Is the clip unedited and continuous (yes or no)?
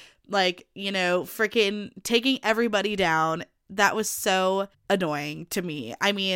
no